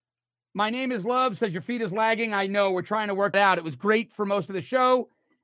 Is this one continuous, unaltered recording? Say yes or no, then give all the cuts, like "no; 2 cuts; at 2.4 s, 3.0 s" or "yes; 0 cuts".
no; 1 cut; at 3.3 s